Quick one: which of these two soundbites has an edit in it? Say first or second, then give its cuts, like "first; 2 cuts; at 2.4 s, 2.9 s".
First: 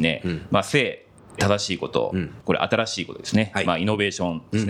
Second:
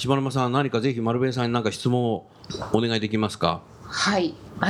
first; 1 cut; at 2.4 s